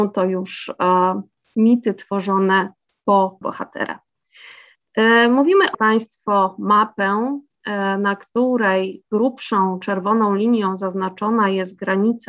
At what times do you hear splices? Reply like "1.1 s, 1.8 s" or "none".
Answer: 3.4 s, 5.7 s